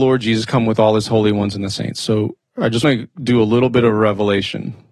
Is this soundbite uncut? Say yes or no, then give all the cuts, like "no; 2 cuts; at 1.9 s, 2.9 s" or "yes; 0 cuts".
no; 1 cut; at 2.8 s